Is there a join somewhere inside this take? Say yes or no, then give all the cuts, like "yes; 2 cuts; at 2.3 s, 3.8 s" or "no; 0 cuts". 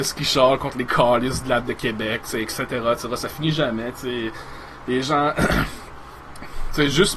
yes; 1 cut; at 1.6 s